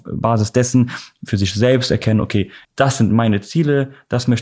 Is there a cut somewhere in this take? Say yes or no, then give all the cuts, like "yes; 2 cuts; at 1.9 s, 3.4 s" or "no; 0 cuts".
yes; 1 cut; at 2.6 s